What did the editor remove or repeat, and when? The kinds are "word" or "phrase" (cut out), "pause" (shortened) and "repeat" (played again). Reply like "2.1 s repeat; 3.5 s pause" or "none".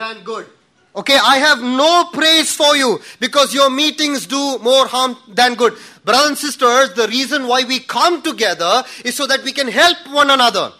none